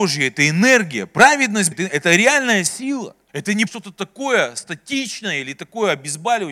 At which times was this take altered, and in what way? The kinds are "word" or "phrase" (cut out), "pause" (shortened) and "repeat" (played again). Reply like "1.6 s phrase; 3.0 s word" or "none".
1.7 s word; 3.3 s pause; 3.7 s word